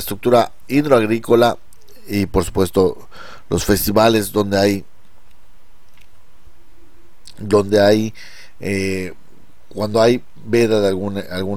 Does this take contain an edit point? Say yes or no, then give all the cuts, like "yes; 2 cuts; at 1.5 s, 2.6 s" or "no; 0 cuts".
no; 0 cuts